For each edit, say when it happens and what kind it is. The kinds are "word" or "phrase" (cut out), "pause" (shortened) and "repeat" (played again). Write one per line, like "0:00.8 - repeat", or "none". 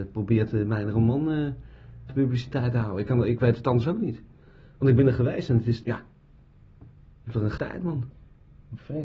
0:02.1 - word
0:05.8 - word
0:07.6 - word